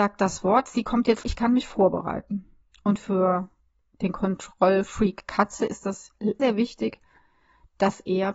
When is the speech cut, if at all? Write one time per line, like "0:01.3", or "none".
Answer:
0:01.2
0:06.4